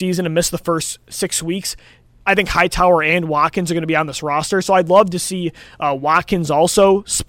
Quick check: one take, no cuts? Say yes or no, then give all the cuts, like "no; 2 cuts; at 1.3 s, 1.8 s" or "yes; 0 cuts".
yes; 0 cuts